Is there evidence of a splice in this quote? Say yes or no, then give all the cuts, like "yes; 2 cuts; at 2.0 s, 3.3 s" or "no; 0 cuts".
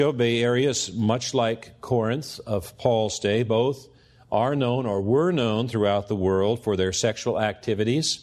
no; 0 cuts